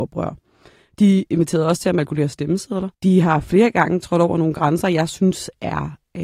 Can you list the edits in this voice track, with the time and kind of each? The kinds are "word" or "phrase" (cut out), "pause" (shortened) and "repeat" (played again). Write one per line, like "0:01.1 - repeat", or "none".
0:02.9 - pause